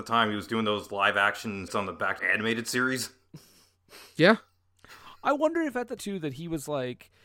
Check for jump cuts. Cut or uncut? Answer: cut